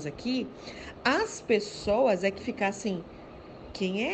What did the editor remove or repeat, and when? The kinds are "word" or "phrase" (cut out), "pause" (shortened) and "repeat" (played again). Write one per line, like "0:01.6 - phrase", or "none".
0:02.4 - word